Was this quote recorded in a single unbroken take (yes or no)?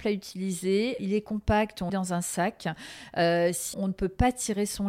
no